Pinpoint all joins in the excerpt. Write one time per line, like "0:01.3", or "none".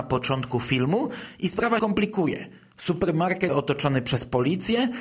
0:01.8
0:03.5